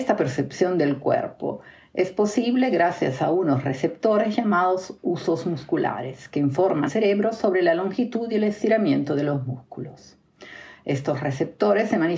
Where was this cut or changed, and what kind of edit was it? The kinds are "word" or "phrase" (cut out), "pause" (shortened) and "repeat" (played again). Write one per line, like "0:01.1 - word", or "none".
0:06.9 - word